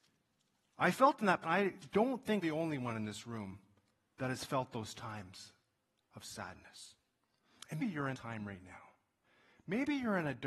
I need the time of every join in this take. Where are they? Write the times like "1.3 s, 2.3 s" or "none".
1.4 s, 2.4 s, 7.8 s, 8.1 s